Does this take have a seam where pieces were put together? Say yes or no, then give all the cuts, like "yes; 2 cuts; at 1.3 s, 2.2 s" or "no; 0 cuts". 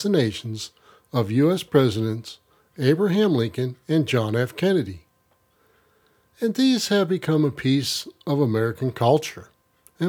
no; 0 cuts